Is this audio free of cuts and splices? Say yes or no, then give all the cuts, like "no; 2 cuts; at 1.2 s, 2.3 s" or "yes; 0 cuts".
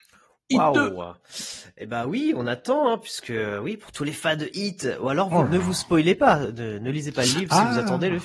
yes; 0 cuts